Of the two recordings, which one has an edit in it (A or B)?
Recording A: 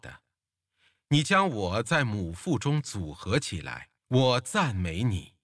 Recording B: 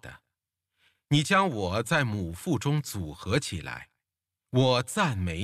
A